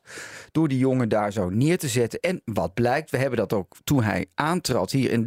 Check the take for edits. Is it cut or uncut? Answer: uncut